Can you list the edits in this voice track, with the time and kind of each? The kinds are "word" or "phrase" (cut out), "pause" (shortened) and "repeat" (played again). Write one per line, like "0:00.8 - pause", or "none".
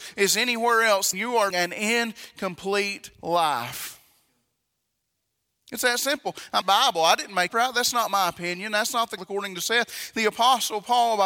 0:01.1 - word
0:01.5 - word
0:03.1 - pause
0:06.6 - phrase
0:07.5 - phrase
0:09.2 - word